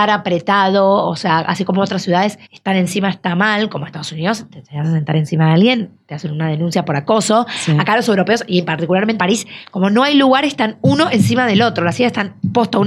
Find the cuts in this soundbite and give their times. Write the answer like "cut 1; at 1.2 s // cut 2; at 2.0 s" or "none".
cut 1; at 2.4 s // cut 2; at 9.2 s